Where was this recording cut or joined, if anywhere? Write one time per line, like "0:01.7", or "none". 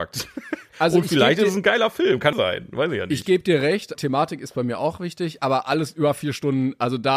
0:02.3
0:03.9